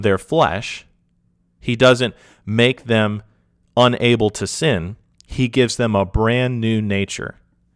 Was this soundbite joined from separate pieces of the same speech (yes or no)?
no